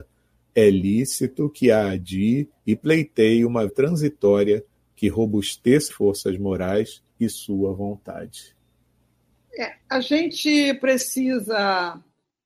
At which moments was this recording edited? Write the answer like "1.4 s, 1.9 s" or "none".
2.6 s, 3.7 s, 5.9 s, 7.1 s, 9.8 s